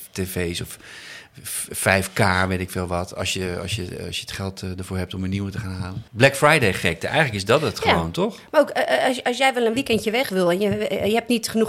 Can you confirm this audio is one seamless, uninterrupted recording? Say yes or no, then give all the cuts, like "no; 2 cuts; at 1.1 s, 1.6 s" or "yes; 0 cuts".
no; 1 cut; at 6.1 s